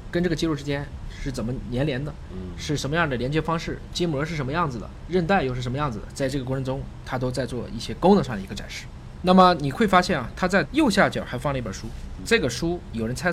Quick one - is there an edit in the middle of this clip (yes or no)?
yes